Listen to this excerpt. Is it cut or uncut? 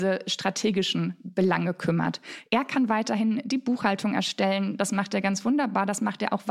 uncut